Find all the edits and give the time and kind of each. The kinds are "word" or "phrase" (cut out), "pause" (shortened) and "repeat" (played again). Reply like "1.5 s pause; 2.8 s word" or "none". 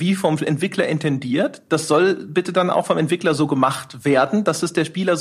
none